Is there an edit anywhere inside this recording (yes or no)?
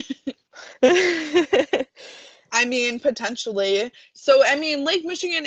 no